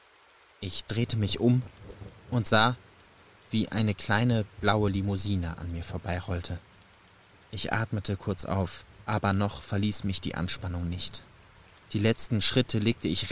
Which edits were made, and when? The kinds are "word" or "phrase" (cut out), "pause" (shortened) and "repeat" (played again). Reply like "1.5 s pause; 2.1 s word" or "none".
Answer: none